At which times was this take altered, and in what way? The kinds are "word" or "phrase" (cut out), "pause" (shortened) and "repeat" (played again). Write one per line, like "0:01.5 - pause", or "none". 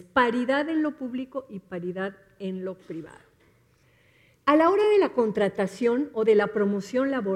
none